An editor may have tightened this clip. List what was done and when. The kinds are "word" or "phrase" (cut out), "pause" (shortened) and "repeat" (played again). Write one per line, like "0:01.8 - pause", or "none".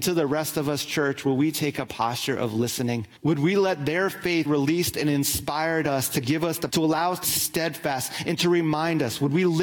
0:03.2 - pause
0:04.5 - word
0:06.7 - word
0:07.2 - word